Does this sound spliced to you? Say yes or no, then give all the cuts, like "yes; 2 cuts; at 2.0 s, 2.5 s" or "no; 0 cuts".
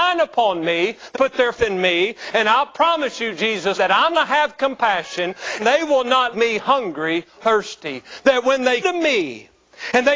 yes; 8 cuts; at 1.1 s, 1.5 s, 3.7 s, 4.1 s, 5.6 s, 6.3 s, 7.4 s, 8.8 s